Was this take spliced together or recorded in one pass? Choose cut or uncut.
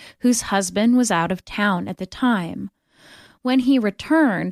uncut